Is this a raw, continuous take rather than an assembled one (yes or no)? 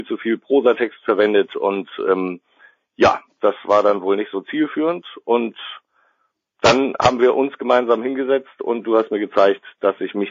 yes